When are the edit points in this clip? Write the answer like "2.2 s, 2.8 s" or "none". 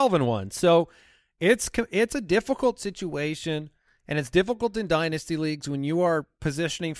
none